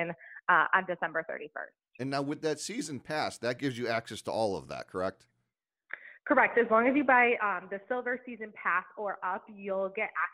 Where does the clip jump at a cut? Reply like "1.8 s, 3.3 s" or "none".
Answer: none